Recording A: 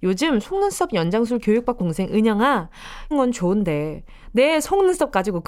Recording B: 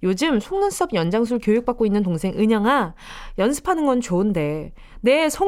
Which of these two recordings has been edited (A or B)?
A